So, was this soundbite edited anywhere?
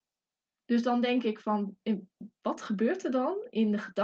no; 0 cuts

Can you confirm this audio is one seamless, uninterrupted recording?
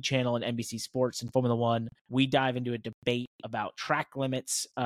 no; 1 cut; at 2.0 s

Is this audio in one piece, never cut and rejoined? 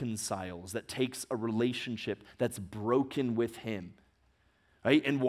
yes; 0 cuts

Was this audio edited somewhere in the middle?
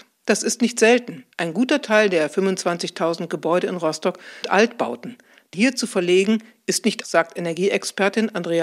yes; 4 cuts; at 1.3 s, 4.4 s, 5.5 s, 7.0 s

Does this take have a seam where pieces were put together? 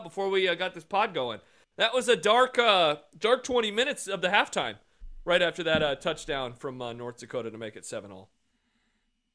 no; 0 cuts

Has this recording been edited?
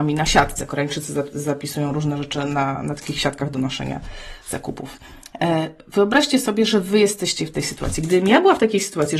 no; 0 cuts

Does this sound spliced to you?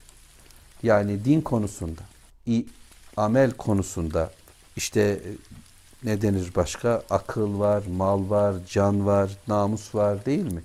yes; 1 cut; at 4.5 s

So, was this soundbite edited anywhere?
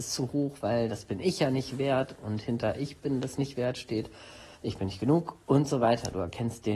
yes; 1 cut; at 4.5 s

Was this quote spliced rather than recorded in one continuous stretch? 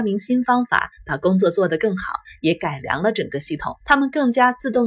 yes; 1 cut; at 3.8 s

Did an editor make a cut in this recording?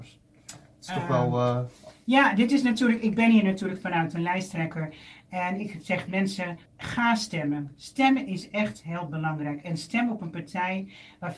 yes; 1 cut; at 6.7 s

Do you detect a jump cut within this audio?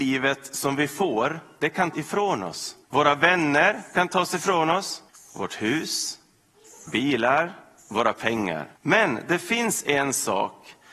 yes; 5 cuts; at 1.9 s, 2.8 s, 5.1 s, 6.9 s, 8.8 s

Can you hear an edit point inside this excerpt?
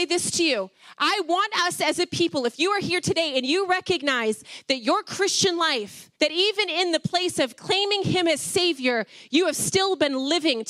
yes; 1 cut; at 6.1 s

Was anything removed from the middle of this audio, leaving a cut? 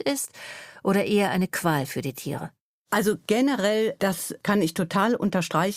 no; 0 cuts

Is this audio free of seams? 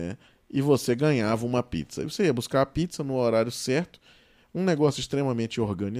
yes; 0 cuts

